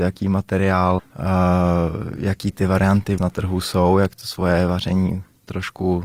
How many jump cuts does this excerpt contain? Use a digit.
2